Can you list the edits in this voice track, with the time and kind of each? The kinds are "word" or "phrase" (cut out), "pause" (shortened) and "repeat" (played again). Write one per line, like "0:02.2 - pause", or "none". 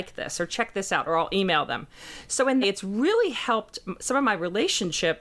0:02.6 - phrase